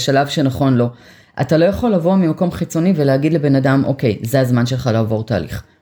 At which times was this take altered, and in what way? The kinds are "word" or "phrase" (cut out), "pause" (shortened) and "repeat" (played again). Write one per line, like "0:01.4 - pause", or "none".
none